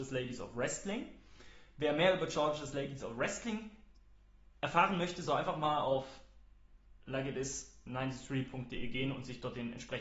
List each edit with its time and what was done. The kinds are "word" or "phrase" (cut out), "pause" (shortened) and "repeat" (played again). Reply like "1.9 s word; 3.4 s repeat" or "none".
none